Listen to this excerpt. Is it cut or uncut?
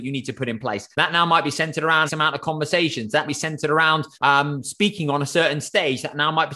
cut